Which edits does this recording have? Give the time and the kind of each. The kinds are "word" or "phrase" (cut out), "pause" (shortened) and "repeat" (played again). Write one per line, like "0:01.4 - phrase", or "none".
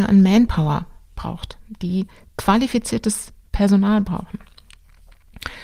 none